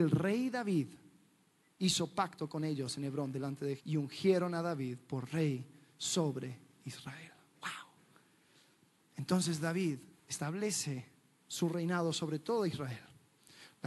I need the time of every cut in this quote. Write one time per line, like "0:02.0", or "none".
0:03.8
0:10.1